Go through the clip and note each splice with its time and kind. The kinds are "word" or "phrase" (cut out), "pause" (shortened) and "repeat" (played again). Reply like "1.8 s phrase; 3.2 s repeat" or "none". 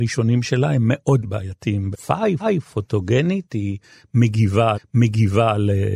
1.2 s word; 1.9 s phrase; 2.4 s repeat; 4.7 s repeat

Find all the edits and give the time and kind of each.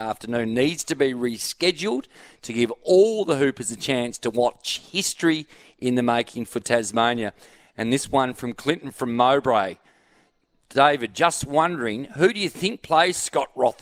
none

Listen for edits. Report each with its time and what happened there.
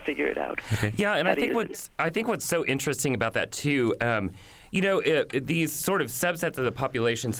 none

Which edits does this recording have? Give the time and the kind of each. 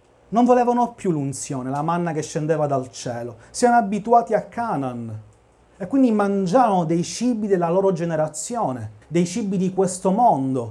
9.0 s pause

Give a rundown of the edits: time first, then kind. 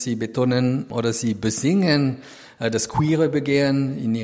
none

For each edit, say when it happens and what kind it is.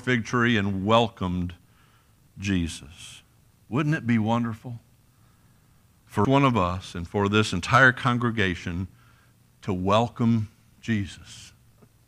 6.2 s word

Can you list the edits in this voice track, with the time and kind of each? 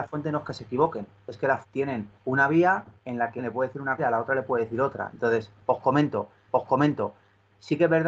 1.6 s word; 2.2 s pause; 3.0 s pause; 3.4 s word; 4.0 s word; 6.5 s repeat

